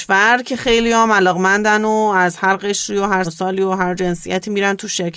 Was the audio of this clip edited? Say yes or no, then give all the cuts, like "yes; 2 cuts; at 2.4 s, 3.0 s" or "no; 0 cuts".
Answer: yes; 1 cut; at 3.2 s